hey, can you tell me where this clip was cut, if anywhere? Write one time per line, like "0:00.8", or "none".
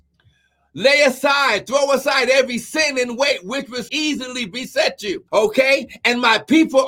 0:03.9
0:05.3